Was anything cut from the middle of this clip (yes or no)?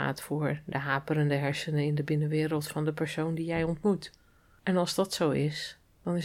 no